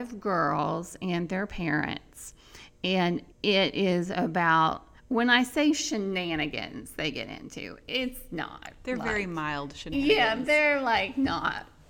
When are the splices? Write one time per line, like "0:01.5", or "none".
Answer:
0:03.3
0:05.0